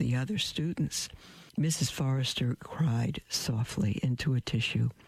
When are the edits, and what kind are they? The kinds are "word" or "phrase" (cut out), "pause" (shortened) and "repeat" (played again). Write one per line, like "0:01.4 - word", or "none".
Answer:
0:01.5 - pause